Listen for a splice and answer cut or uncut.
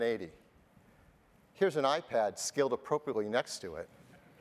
uncut